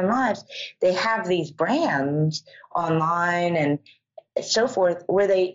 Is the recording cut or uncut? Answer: uncut